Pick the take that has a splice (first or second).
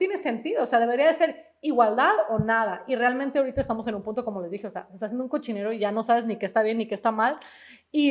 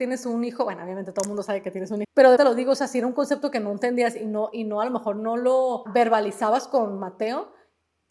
second